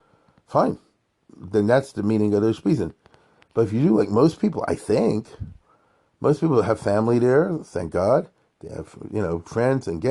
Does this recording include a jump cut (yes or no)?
no